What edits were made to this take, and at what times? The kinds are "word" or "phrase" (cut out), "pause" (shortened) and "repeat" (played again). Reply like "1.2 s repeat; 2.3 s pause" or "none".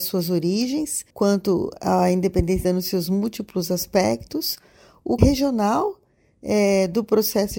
1.1 s pause; 2.6 s word; 5.2 s word